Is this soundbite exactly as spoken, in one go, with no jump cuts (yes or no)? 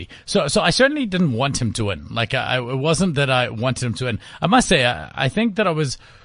yes